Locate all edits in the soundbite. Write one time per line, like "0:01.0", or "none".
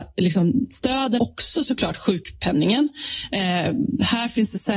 0:01.2